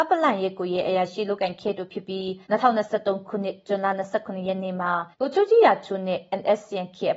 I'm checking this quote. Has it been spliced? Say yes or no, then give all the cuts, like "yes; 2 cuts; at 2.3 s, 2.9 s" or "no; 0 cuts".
yes; 2 cuts; at 2.4 s, 5.1 s